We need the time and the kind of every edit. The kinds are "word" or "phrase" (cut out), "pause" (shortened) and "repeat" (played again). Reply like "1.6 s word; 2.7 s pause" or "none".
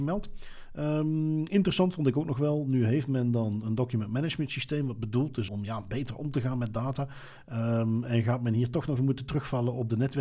5.5 s word; 9.0 s word